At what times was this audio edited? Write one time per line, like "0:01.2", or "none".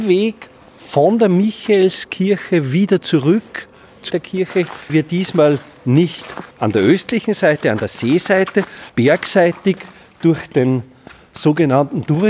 0:04.1
0:04.9
0:06.5
0:08.9